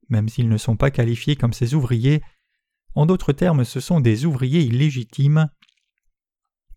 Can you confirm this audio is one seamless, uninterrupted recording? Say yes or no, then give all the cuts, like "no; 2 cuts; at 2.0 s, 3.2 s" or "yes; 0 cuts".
yes; 0 cuts